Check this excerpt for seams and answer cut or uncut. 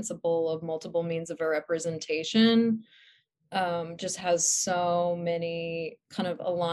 uncut